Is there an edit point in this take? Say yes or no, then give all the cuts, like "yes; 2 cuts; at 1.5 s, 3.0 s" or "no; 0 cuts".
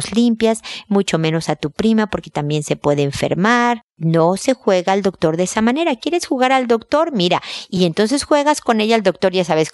no; 0 cuts